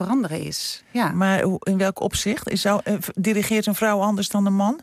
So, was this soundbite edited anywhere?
no; 0 cuts

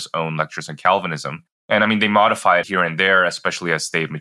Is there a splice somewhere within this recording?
yes; 2 cuts; at 1.5 s, 2.6 s

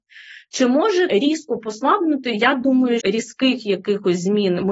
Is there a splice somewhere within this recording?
yes; 2 cuts; at 1.1 s, 3.0 s

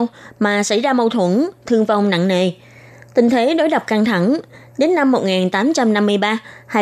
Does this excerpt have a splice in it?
no; 0 cuts

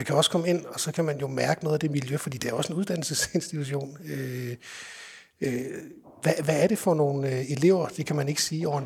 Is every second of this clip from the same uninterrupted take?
yes; 0 cuts

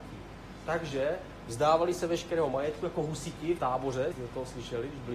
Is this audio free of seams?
no; 2 cuts; at 3.6 s, 4.1 s

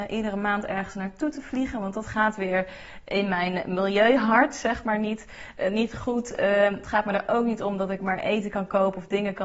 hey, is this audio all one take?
yes; 0 cuts

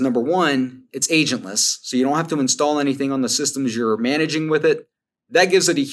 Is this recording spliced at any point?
no; 0 cuts

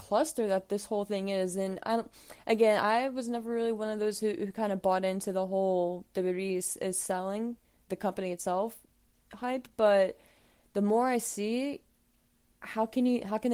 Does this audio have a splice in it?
no; 0 cuts

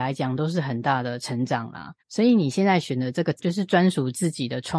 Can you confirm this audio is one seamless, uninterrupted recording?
no; 1 cut; at 2.0 s

